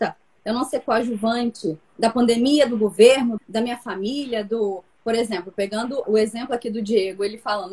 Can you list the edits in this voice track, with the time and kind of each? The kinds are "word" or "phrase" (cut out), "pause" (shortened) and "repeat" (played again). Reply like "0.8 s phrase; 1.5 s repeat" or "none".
3.4 s word; 6.0 s word

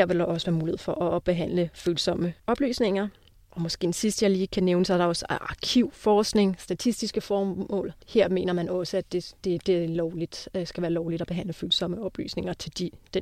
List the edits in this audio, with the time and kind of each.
2.4 s pause; 8.0 s pause

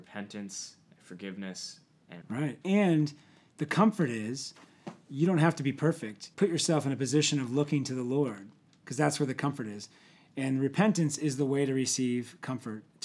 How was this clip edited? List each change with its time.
2.2 s word; 2.6 s word; 6.3 s word; 8.7 s word

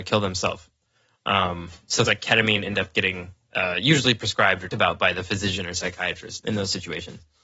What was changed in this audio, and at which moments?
2.1 s word; 3.4 s pause; 4.7 s word; 6.4 s word

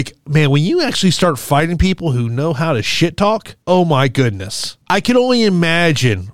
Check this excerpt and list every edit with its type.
3.6 s pause; 4.8 s pause

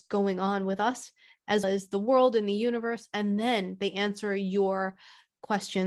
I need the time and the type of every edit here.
1.6 s word

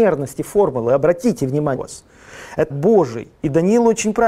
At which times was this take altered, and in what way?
1.8 s word; 2.7 s word

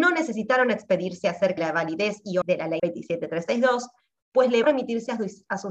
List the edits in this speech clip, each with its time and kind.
1.6 s word; 2.4 s word; 2.8 s word; 4.6 s word

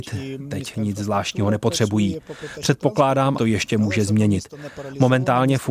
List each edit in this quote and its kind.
3.4 s phrase

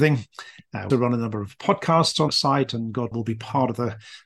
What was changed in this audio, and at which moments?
0.9 s word; 2.3 s word; 3.1 s word

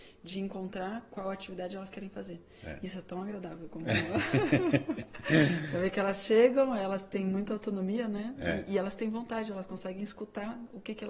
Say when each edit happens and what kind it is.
none

